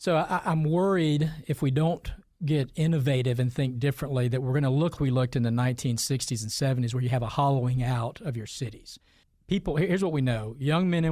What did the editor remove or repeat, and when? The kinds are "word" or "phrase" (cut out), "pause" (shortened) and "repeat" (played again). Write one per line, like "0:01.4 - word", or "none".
0:05.0 - word

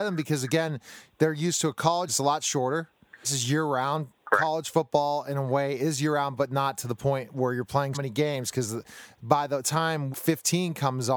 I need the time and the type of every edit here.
0:02.1 - word
0:03.2 - word
0:07.9 - word
0:10.1 - word

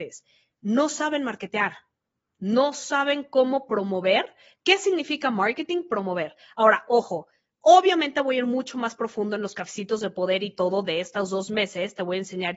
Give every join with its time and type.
none

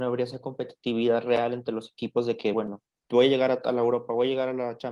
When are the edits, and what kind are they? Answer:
none

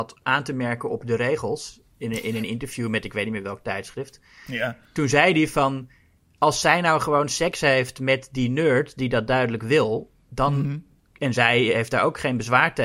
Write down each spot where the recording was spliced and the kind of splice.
0:06.4 - word

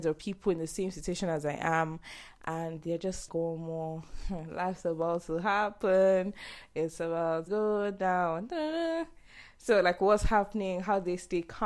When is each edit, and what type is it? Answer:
0:03.3 - word
0:07.5 - word

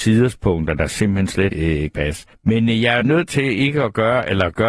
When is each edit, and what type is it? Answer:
0:01.5 - word
0:01.9 - word
0:02.3 - pause
0:03.0 - word

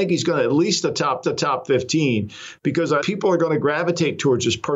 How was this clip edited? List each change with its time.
0:01.2 - repeat
0:03.0 - word

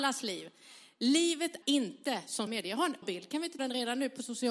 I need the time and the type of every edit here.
0:01.6 - word
0:02.5 - word
0:03.0 - word
0:03.6 - word

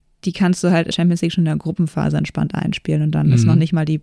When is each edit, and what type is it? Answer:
0:00.9 - word

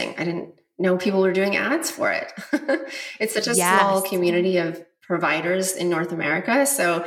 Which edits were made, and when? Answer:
none

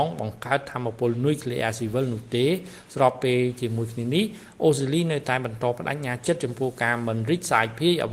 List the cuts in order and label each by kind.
none

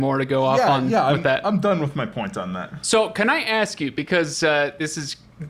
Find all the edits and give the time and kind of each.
none

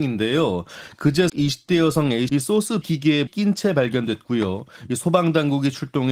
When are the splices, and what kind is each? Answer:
0:01.3 - word
0:02.3 - word
0:02.8 - word
0:03.3 - word

